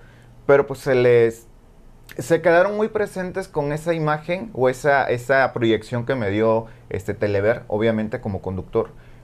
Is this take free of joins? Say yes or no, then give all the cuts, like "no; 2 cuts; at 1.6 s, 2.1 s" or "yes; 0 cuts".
yes; 0 cuts